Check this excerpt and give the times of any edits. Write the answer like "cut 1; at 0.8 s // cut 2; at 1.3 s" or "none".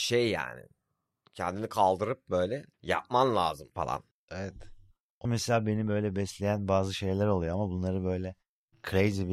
cut 1; at 2.7 s // cut 2; at 3.7 s // cut 3; at 5.2 s